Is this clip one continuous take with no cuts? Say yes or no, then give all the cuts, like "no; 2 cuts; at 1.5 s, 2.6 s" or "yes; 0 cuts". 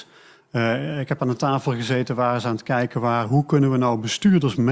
yes; 0 cuts